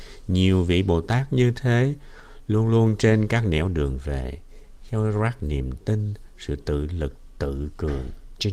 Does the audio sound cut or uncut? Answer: uncut